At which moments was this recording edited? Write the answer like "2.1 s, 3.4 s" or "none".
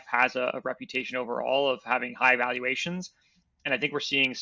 none